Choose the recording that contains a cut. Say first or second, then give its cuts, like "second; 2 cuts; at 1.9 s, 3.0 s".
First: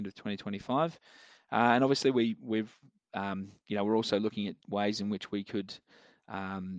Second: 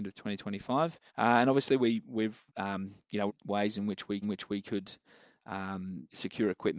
second; 4 cuts; at 1.1 s, 2.5 s, 3.3 s, 4.2 s